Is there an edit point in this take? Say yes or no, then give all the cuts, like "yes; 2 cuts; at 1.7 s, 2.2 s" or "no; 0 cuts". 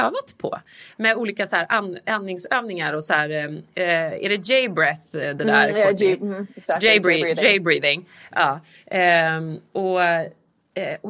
no; 0 cuts